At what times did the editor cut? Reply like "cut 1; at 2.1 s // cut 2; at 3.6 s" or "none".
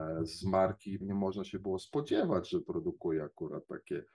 cut 1; at 1.0 s